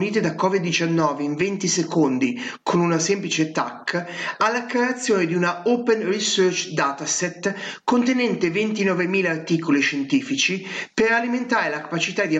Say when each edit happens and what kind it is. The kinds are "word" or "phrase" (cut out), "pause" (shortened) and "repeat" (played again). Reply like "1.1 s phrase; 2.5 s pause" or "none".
none